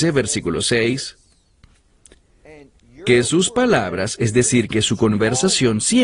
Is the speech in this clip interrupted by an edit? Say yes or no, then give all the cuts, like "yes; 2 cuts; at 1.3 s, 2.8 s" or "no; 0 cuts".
no; 0 cuts